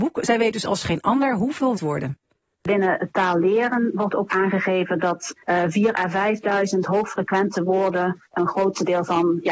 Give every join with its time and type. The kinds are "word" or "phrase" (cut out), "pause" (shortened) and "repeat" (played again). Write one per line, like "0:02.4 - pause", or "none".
0:01.8 - phrase
0:04.3 - word
0:05.4 - pause